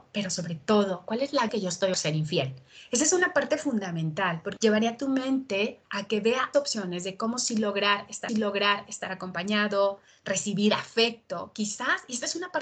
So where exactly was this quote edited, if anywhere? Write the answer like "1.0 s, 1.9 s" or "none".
1.5 s, 1.9 s, 4.6 s, 5.9 s, 6.5 s, 8.3 s